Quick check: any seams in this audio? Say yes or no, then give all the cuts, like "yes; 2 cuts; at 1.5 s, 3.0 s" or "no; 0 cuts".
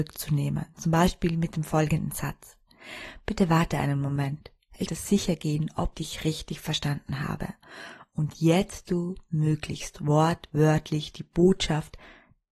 yes; 3 cuts; at 4.9 s, 5.9 s, 8.9 s